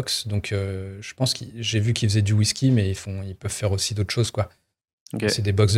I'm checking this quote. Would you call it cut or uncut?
uncut